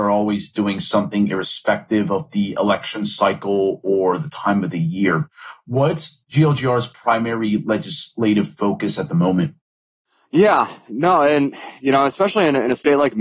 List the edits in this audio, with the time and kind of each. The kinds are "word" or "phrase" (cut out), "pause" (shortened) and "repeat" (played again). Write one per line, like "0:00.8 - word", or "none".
none